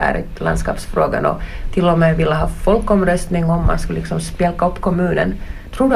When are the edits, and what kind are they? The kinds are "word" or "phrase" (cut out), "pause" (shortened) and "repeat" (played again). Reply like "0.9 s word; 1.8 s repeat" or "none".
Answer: none